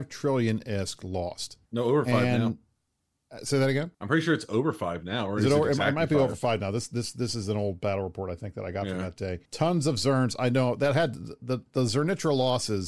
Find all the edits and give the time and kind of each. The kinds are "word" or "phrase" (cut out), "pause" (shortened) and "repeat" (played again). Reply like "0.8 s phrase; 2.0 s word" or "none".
1.7 s pause; 2.9 s pause; 3.9 s pause; 9.4 s pause